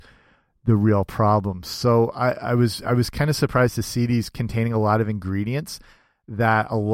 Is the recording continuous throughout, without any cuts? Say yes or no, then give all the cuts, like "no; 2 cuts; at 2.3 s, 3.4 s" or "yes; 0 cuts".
yes; 0 cuts